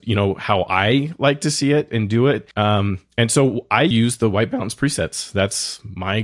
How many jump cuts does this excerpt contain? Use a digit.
2